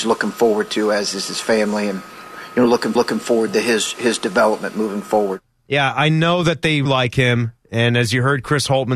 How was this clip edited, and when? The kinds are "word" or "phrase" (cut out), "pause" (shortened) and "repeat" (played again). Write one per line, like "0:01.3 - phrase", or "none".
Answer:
0:03.0 - repeat
0:06.9 - word